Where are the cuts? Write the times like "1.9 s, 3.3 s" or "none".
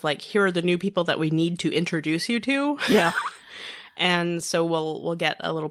none